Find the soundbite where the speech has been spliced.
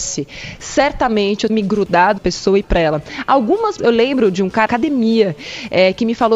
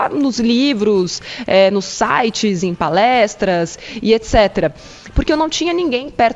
first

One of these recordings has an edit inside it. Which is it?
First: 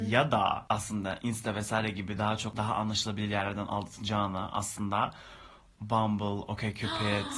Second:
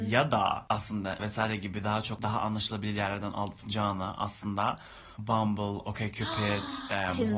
second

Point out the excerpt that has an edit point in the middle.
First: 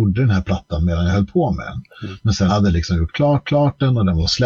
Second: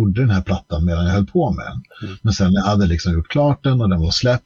first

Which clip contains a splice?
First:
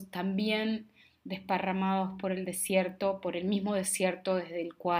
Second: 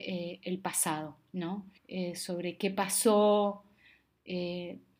second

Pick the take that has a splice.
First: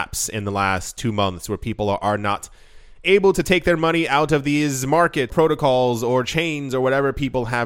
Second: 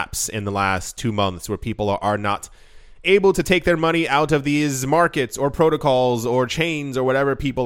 first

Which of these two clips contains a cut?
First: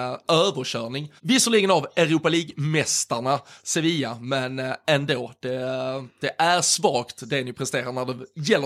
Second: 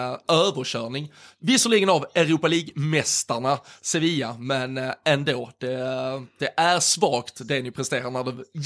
first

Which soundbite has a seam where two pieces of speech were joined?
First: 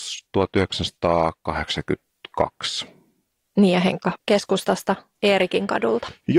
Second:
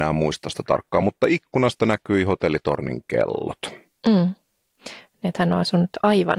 first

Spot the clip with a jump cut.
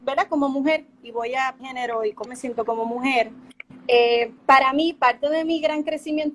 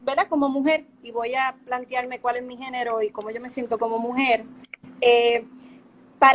first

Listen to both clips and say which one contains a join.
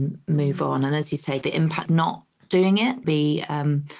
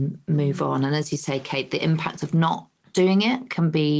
first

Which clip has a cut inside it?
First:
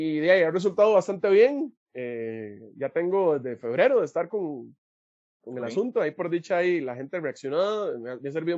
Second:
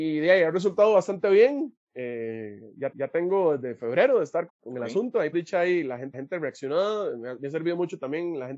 second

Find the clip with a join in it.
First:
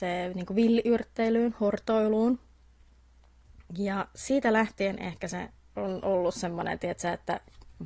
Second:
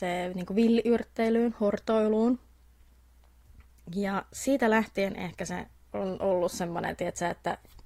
first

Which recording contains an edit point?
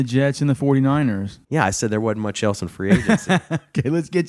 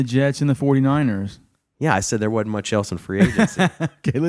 first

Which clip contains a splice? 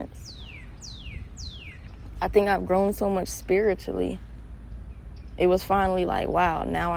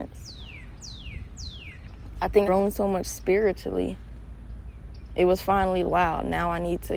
second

